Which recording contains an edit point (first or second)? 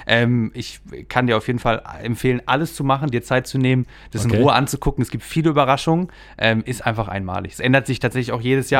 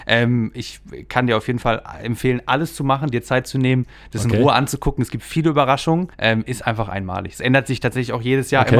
second